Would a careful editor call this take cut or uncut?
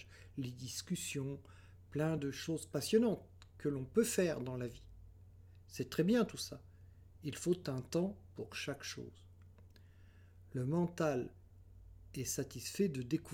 uncut